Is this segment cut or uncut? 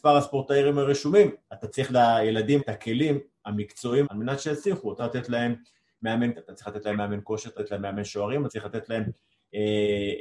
cut